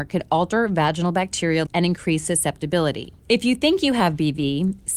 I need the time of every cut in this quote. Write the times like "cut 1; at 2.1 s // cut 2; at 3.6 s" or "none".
cut 1; at 1.7 s // cut 2; at 3.2 s